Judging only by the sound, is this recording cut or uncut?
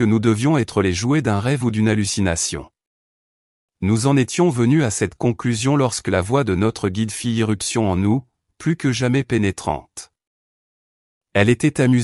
uncut